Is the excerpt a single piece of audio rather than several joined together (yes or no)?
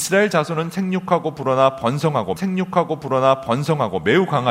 no